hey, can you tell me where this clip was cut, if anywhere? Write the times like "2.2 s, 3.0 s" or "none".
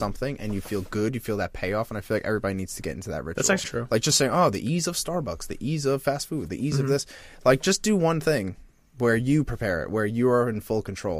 3.6 s